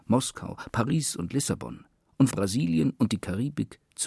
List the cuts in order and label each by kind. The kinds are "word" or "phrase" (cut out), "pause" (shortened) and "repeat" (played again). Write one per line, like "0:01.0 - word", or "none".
0:02.3 - phrase